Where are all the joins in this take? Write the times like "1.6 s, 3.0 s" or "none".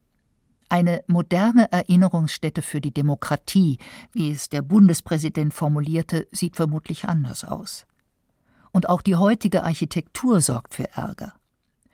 none